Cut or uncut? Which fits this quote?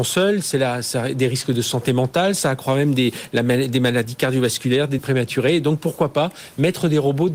cut